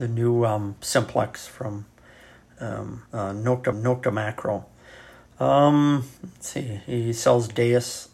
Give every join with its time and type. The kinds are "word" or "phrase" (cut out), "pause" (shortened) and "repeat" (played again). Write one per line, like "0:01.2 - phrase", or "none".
0:03.1 - pause
0:03.7 - repeat
0:06.2 - pause